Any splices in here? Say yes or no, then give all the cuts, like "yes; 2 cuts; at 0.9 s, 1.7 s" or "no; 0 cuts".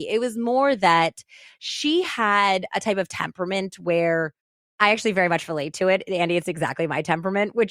no; 0 cuts